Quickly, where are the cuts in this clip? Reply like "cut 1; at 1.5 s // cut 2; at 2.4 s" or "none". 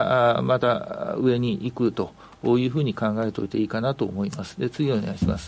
none